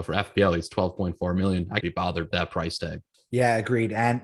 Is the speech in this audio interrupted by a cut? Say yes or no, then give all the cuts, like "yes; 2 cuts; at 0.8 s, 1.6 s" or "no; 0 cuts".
yes; 2 cuts; at 1.8 s, 2.3 s